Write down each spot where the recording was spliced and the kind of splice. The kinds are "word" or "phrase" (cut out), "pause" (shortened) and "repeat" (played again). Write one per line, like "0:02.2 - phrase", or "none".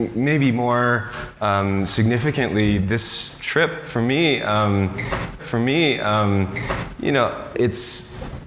0:05.4 - repeat
0:07.5 - word